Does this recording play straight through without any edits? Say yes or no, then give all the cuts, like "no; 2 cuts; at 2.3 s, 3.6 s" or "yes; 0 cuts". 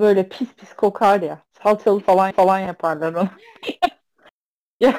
no; 1 cut; at 2.3 s